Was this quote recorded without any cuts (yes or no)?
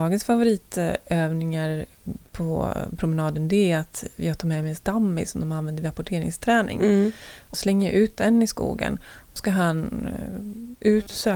no